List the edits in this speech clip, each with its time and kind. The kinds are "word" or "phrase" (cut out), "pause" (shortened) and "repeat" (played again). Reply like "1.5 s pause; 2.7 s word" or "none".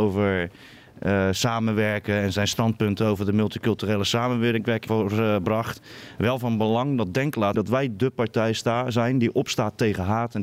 4.9 s word; 7.5 s word